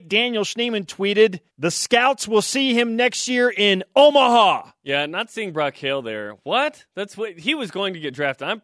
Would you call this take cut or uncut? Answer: cut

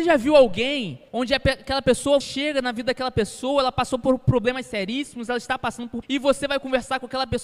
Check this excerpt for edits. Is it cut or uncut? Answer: cut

